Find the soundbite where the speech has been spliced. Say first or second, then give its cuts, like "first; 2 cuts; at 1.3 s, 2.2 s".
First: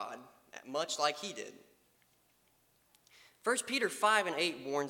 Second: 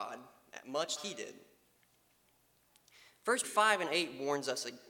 second; 2 cuts; at 1.0 s, 3.4 s